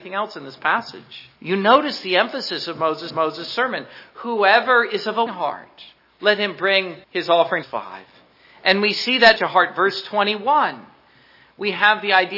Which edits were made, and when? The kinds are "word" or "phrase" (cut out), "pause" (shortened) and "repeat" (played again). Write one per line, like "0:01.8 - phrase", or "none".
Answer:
0:01.4 - pause
0:03.1 - repeat
0:05.3 - word
0:06.0 - pause
0:07.0 - pause
0:07.6 - phrase
0:09.4 - phrase